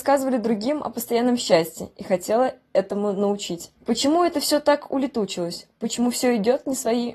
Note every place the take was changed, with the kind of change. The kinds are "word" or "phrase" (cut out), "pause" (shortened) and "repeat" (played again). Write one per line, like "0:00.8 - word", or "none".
0:03.7 - pause